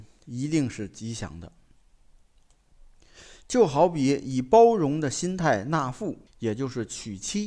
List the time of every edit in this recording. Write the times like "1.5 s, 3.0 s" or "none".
6.3 s